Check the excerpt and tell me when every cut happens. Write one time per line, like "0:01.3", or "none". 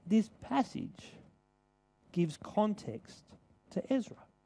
none